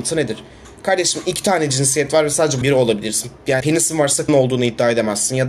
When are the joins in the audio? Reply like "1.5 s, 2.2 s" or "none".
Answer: 2.6 s, 3.6 s, 4.3 s